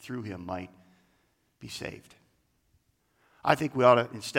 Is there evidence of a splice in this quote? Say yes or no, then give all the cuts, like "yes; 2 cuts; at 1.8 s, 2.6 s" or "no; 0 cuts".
no; 0 cuts